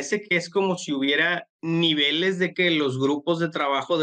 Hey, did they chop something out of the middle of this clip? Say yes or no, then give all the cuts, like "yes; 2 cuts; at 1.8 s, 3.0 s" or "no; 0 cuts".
yes; 2 cuts; at 1.5 s, 2.5 s